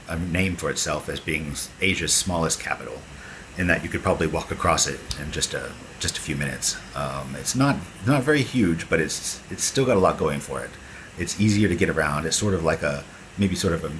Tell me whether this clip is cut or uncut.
uncut